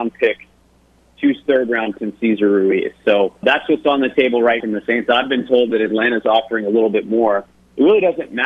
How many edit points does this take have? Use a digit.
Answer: 4